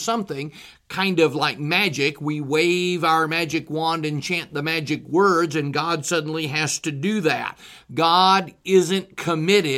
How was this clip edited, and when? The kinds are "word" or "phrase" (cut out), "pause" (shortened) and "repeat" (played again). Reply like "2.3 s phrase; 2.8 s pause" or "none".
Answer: none